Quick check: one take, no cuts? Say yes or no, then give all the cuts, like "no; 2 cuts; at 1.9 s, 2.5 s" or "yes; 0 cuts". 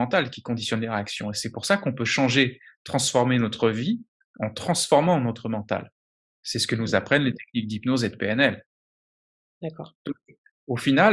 yes; 0 cuts